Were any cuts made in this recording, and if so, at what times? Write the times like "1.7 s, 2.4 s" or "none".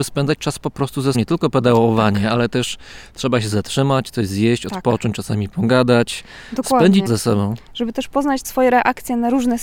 1.1 s, 7.1 s, 8.4 s